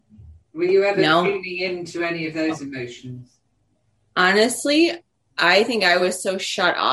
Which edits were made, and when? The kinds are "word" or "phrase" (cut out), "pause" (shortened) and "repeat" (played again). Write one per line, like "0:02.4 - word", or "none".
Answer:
none